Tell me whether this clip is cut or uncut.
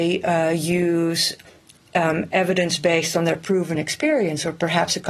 uncut